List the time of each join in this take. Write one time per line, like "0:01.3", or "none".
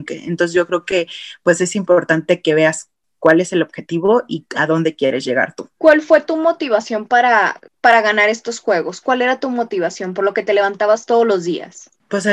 0:05.7
0:07.7